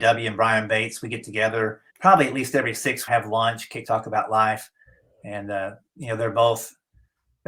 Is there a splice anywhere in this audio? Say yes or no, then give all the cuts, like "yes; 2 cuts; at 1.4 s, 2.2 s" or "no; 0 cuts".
yes; 3 cuts; at 1.9 s, 3.1 s, 3.8 s